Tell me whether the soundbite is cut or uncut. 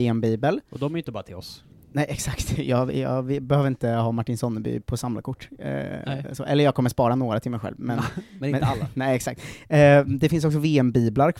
uncut